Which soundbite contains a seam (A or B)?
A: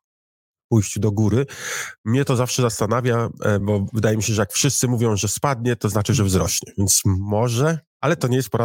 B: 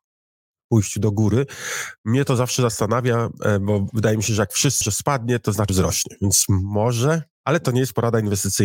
B